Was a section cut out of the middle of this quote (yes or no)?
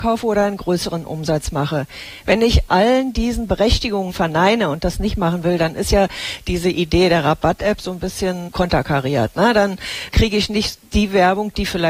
no